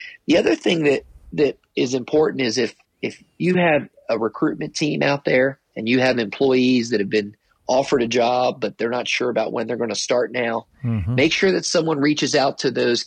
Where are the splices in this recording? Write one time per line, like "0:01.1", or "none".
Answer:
none